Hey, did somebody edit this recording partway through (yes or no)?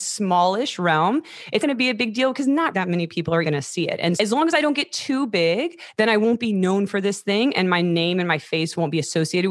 yes